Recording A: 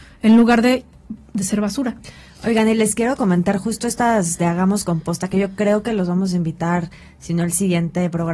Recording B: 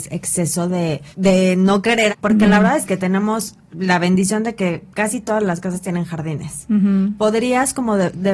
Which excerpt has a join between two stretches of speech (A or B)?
B